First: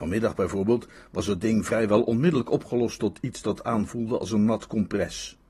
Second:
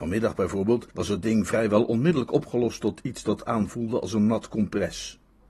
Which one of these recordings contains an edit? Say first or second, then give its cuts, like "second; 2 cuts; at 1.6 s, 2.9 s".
second; 1 cut; at 0.9 s